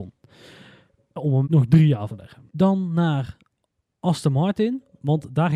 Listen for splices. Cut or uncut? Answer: cut